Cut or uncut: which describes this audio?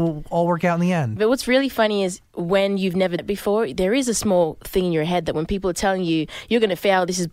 cut